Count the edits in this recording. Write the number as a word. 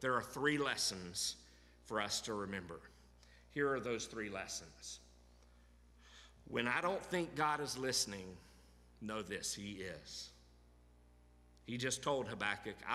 zero